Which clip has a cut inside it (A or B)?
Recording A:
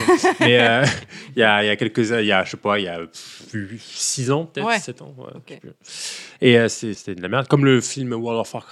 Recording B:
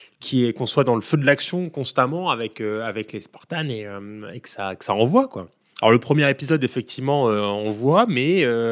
A